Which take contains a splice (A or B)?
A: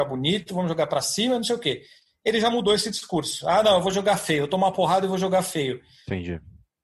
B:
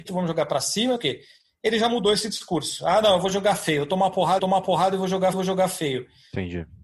B